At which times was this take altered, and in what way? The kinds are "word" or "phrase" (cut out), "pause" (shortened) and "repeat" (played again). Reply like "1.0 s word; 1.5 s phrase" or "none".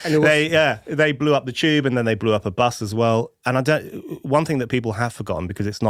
none